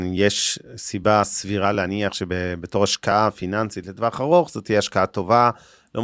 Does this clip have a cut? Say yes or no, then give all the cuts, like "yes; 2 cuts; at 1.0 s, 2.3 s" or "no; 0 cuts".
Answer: no; 0 cuts